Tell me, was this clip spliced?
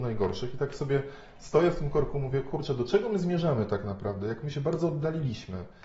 no; 0 cuts

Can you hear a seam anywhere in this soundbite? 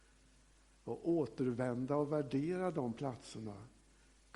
no; 0 cuts

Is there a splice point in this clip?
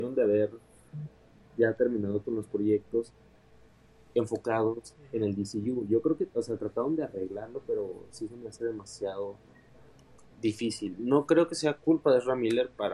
no; 0 cuts

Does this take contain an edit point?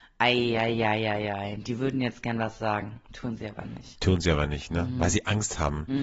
no; 0 cuts

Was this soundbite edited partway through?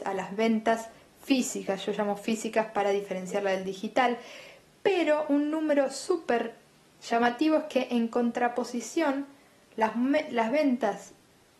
no; 0 cuts

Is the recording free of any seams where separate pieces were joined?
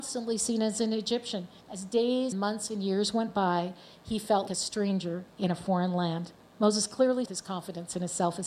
no; 6 cuts; at 1.6 s, 2.3 s, 4.0 s, 4.5 s, 5.3 s, 7.3 s

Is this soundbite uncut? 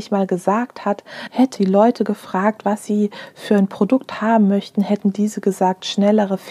no; 1 cut; at 1.5 s

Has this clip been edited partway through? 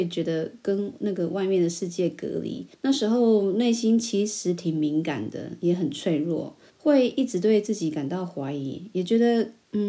yes; 2 cuts; at 2.7 s, 6.7 s

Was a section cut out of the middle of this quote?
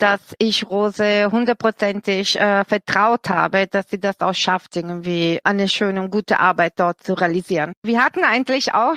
yes; 1 cut; at 7.8 s

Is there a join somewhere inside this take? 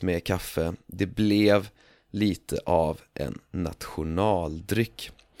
no; 0 cuts

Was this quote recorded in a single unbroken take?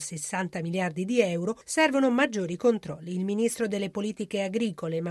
yes; 0 cuts

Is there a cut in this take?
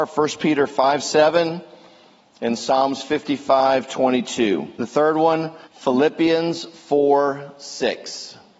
yes; 2 cuts; at 4.7 s, 5.6 s

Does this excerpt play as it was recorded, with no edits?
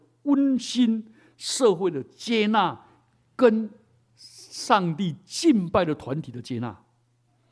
yes; 0 cuts

